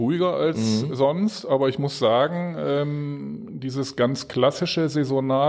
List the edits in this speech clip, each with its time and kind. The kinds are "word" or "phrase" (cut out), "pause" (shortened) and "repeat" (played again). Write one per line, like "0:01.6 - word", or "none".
none